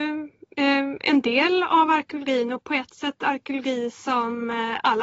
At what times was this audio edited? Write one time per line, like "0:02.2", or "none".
none